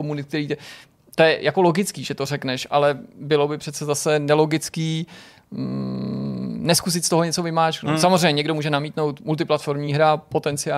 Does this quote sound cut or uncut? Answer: uncut